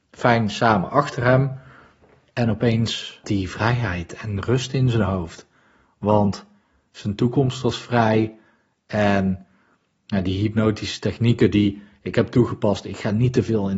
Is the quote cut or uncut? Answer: cut